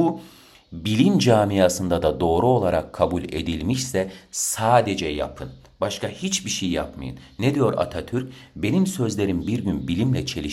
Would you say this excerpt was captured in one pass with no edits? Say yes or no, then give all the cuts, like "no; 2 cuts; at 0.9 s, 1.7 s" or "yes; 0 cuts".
yes; 0 cuts